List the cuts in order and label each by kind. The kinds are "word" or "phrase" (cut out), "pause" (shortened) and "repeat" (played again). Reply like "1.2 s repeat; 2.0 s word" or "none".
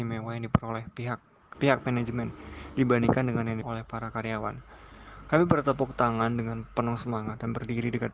1.5 s word; 3.6 s word